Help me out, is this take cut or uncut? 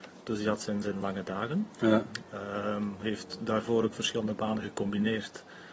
cut